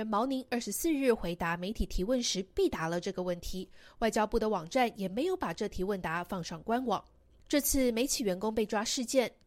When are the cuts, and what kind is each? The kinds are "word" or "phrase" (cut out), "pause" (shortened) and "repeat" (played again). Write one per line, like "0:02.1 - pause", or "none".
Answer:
none